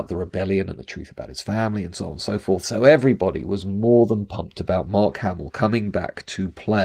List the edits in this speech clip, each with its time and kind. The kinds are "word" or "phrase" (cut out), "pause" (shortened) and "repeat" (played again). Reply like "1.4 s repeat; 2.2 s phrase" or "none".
none